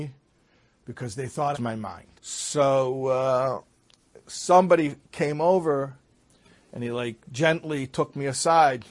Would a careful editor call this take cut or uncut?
cut